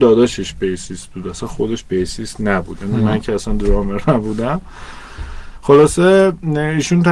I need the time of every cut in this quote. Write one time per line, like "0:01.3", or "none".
none